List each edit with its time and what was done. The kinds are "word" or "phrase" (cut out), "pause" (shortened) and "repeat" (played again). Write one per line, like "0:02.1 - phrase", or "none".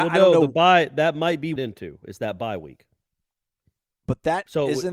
0:01.6 - phrase